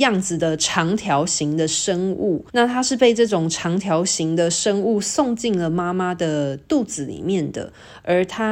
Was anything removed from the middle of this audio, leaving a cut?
yes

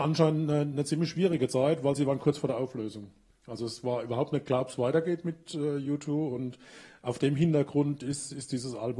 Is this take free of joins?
yes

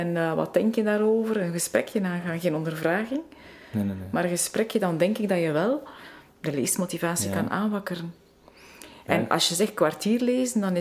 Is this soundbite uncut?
yes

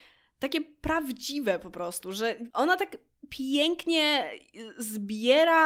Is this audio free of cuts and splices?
yes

